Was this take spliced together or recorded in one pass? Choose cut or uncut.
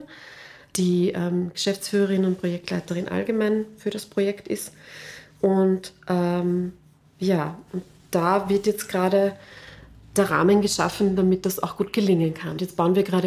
uncut